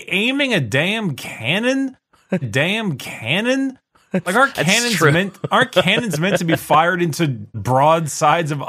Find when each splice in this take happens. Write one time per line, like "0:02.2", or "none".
0:02.4
0:07.5